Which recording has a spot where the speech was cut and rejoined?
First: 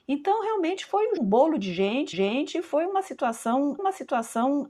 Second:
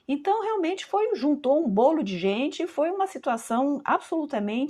first; 3 cuts; at 1.2 s, 2.1 s, 3.8 s

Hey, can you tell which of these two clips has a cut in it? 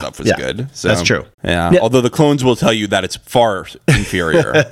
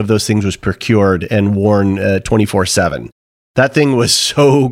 first; 1 cut; at 1.3 s

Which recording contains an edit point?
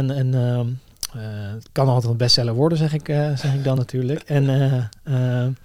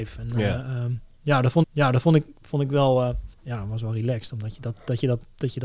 second; 2 cuts; at 1.6 s, 3.3 s

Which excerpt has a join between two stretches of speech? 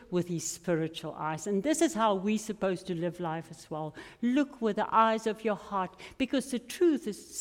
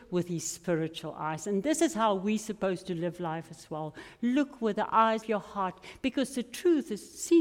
second; 1 cut; at 5.2 s

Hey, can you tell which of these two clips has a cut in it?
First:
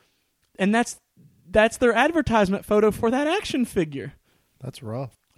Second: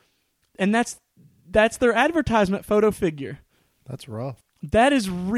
second; 1 cut; at 2.9 s

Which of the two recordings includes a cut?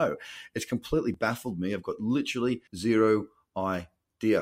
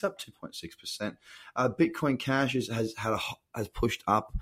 first; 1 cut; at 2.7 s

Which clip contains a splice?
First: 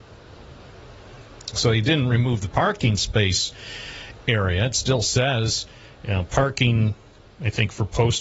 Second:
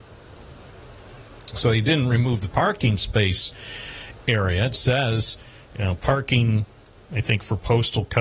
second; 1 cut; at 4.7 s

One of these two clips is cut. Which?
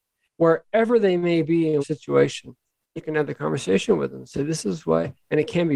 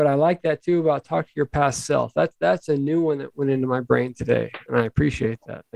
first; 2 cuts; at 1.8 s, 3.0 s

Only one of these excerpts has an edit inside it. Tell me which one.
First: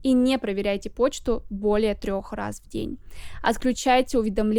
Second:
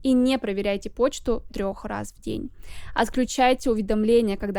second; 1 cut; at 1.5 s

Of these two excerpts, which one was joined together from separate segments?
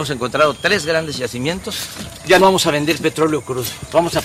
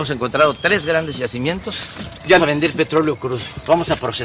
second; 1 cut; at 2.4 s

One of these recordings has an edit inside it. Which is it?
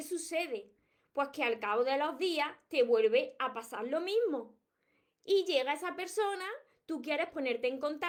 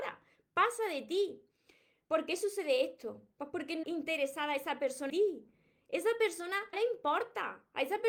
second; 3 cuts; at 3.8 s, 5.1 s, 6.7 s

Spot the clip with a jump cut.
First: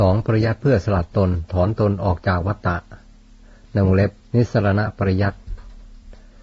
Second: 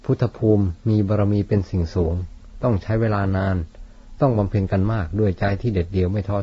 first; 1 cut; at 4.2 s

